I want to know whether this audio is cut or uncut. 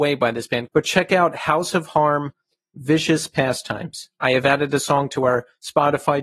uncut